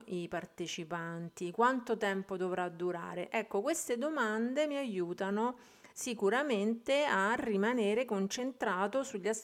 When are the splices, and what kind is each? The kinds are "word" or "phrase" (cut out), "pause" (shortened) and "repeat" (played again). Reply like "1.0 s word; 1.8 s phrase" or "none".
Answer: 5.9 s pause